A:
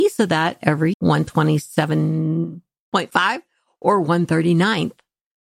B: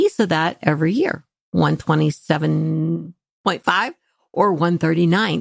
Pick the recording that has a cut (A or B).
A